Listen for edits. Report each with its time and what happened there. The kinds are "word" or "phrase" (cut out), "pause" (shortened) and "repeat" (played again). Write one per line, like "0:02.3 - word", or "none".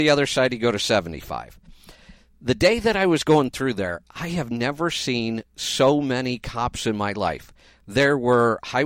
none